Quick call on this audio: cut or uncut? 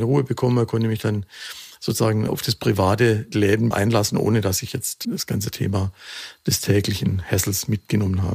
cut